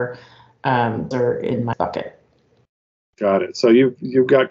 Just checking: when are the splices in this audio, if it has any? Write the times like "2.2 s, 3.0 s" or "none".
1.1 s, 1.7 s